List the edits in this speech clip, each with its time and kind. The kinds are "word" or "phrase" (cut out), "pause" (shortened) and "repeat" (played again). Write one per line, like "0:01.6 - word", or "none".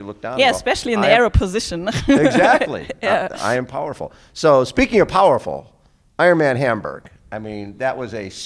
none